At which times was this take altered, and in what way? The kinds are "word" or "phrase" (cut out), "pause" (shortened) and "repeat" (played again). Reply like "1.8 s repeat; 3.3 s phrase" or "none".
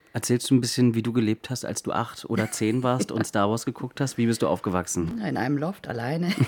none